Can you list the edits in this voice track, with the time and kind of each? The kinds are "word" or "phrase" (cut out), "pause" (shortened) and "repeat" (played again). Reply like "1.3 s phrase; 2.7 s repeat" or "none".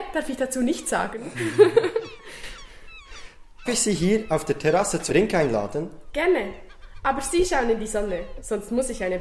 3.7 s word; 5.1 s word